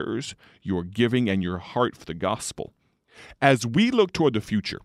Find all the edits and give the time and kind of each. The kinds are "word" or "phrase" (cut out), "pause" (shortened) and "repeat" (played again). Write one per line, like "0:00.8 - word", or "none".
none